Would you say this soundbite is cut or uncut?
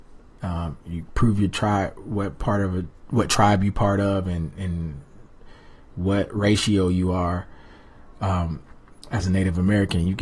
uncut